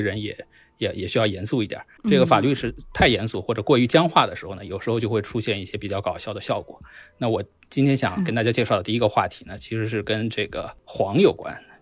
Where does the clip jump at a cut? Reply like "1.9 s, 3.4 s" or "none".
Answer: 2.0 s